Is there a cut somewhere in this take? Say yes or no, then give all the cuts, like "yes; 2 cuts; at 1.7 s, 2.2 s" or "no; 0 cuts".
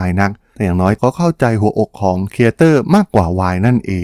yes; 1 cut; at 1.0 s